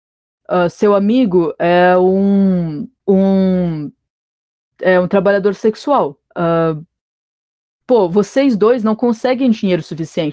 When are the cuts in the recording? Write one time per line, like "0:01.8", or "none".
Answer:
0:03.0
0:06.3